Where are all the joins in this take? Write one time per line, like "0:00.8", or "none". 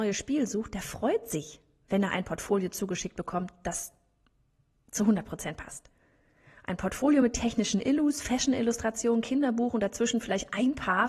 none